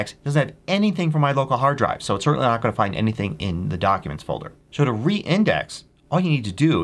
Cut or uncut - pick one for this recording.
cut